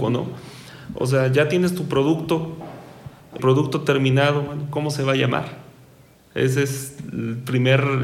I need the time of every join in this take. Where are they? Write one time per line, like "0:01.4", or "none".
0:03.4